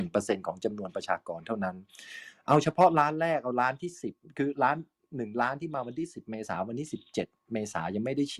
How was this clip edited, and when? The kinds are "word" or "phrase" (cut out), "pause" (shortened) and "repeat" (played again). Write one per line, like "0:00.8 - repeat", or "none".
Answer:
none